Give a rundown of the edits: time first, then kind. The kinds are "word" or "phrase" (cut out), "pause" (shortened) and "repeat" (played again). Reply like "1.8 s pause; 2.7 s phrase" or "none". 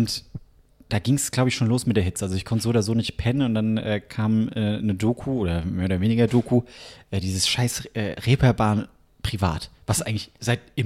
none